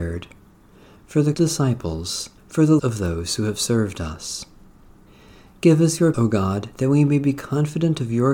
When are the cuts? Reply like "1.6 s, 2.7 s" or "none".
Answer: 1.3 s, 2.4 s, 2.8 s, 5.1 s, 6.1 s